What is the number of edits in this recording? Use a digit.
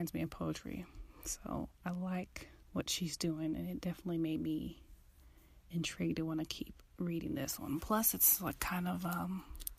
1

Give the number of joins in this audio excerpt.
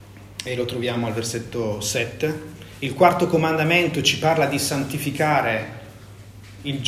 0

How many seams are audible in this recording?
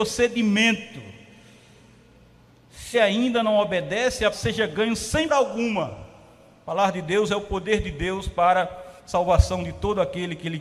4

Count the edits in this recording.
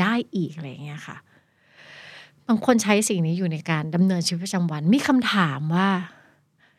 0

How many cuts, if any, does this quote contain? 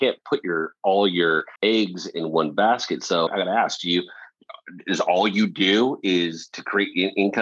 2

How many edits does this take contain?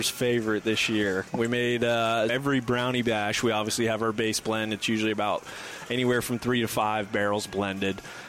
1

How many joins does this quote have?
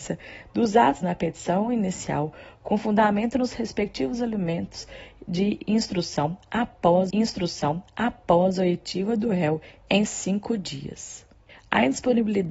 3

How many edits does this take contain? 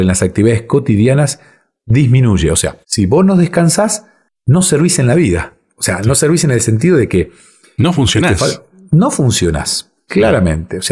1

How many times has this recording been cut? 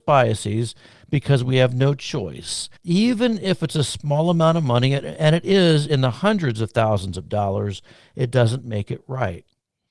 1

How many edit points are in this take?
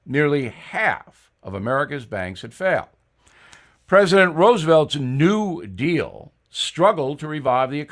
0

